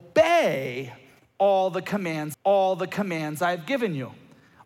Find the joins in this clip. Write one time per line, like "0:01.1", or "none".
0:02.3